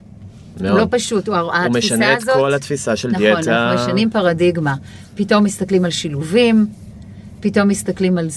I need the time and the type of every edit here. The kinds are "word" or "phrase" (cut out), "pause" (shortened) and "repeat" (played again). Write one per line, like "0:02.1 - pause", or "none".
none

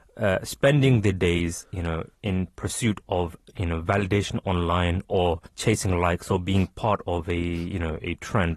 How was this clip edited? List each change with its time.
0:02.1 - word
0:05.5 - pause

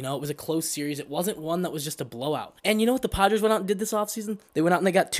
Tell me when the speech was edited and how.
0:02.6 - pause

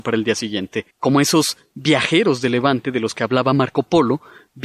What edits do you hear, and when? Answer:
0:00.9 - pause

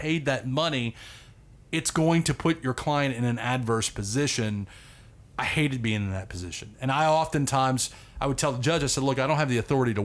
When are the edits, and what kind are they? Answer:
none

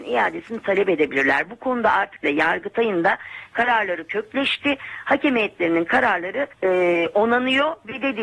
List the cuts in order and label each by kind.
0:02.2 - word
0:06.5 - pause

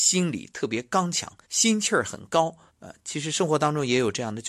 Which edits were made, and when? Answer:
0:01.4 - pause
0:02.7 - pause

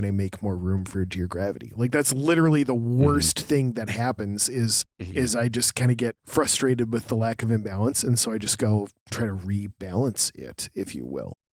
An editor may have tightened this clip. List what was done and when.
0:09.0 - pause

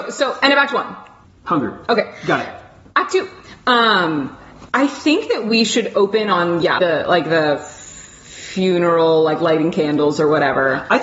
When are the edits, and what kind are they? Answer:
0:01.2 - pause
0:04.7 - pause
0:06.8 - word

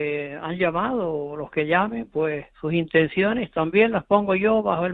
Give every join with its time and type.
0:02.5 - pause

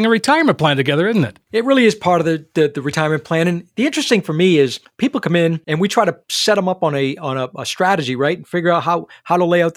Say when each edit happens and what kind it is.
0:04.2 - word

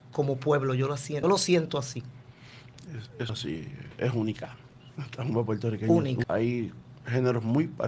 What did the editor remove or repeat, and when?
0:01.2 - word
0:03.3 - word
0:06.2 - word

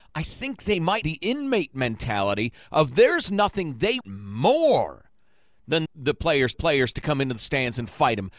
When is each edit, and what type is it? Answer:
0:01.0 - word
0:04.0 - word
0:05.9 - word
0:06.5 - repeat

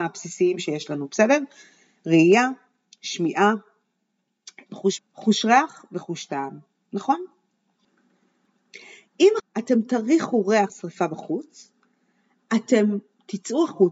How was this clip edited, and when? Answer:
0:05.0 - word
0:09.4 - word
0:10.7 - word

